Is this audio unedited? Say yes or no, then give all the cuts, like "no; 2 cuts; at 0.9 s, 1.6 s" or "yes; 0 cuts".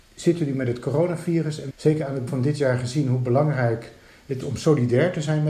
no; 3 cuts; at 1.7 s, 2.3 s, 4.4 s